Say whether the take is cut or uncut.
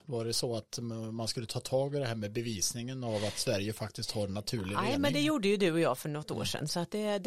uncut